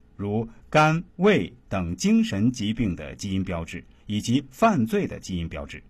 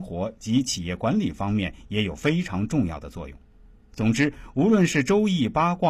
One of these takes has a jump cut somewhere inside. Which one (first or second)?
first